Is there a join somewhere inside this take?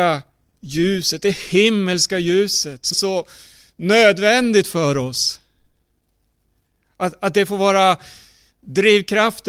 yes; 1 cut; at 2.9 s

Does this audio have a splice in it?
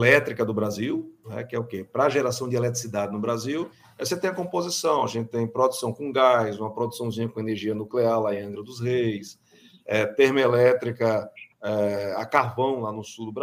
no; 0 cuts

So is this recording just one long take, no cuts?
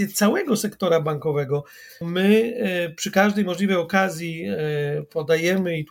no; 1 cut; at 2.0 s

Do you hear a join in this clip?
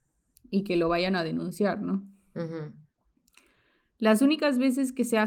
no; 0 cuts

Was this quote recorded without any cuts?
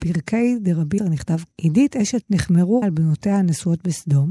no; 4 cuts; at 1.0 s, 1.5 s, 2.2 s, 2.8 s

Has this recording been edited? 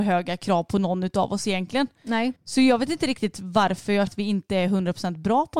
yes; 2 cuts; at 2.4 s, 4.1 s

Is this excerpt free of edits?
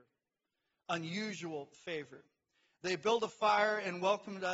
yes; 0 cuts

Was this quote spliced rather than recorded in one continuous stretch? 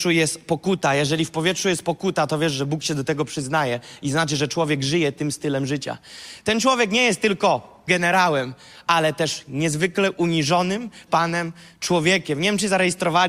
yes; 2 cuts; at 7.9 s, 11.1 s

